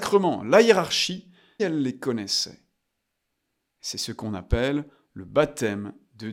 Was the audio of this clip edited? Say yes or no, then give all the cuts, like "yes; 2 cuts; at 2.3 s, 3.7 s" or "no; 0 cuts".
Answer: yes; 1 cut; at 1.6 s